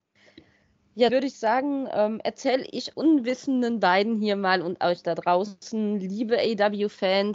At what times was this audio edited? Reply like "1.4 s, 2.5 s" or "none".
1.1 s, 2.9 s